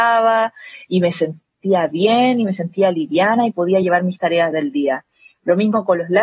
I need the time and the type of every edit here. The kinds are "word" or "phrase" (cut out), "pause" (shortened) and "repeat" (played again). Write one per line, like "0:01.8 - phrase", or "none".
none